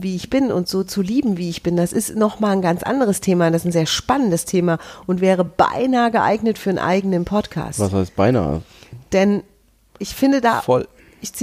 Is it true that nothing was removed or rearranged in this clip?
yes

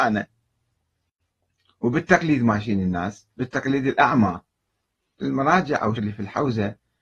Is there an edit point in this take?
yes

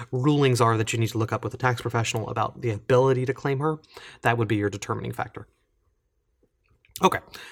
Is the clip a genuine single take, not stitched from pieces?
yes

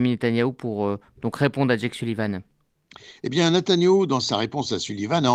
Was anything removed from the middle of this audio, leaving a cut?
no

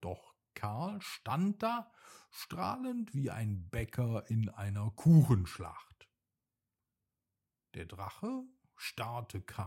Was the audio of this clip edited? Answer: no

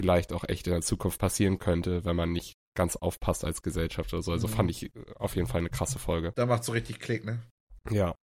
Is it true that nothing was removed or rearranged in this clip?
yes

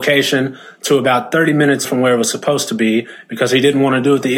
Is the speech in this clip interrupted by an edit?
yes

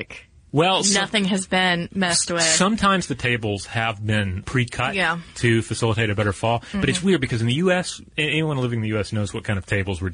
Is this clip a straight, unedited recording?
no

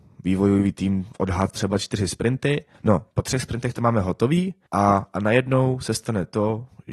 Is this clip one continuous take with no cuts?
no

